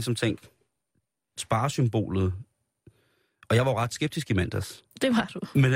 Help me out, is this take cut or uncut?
uncut